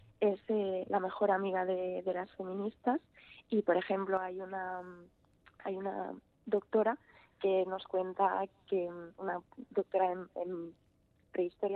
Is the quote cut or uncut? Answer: cut